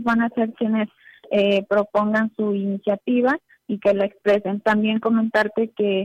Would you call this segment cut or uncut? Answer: uncut